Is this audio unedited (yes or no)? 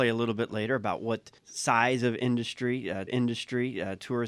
no